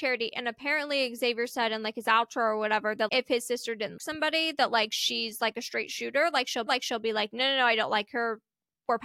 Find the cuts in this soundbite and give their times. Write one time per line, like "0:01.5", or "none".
0:03.1
0:04.0
0:06.7

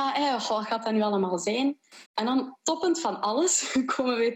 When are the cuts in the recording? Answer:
0:02.1

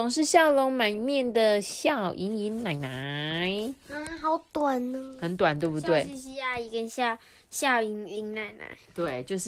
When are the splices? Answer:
none

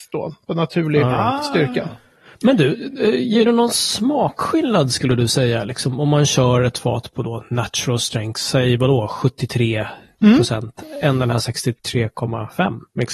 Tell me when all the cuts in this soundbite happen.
none

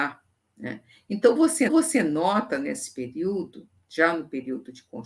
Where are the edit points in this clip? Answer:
0:01.7

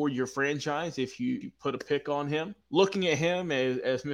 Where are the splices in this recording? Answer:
0:01.4
0:02.6

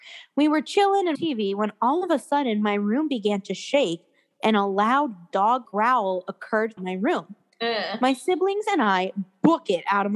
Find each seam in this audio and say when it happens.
0:01.1
0:05.6
0:06.8

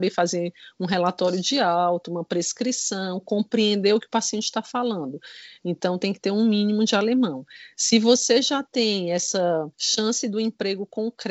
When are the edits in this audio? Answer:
0:09.7

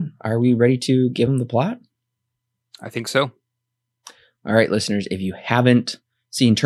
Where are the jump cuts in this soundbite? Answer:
none

